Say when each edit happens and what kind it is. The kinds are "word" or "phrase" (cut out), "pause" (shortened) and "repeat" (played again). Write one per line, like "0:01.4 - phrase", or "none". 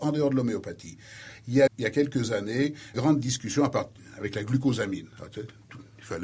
0:01.7 - word
0:02.9 - word